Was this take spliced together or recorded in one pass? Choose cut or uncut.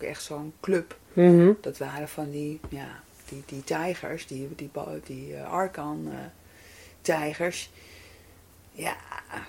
uncut